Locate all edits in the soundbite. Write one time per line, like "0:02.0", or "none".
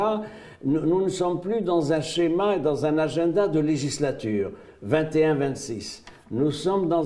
none